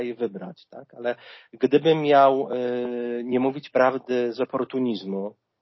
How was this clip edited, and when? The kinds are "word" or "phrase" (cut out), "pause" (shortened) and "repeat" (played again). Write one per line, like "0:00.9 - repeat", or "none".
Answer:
none